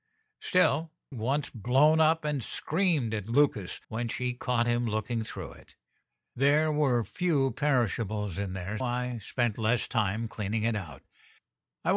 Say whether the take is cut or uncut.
cut